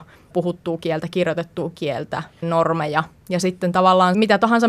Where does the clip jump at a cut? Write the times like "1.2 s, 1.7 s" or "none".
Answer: 2.4 s